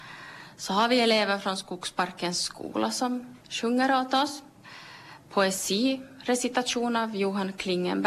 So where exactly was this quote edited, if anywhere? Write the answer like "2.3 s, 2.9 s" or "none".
3.4 s, 5.2 s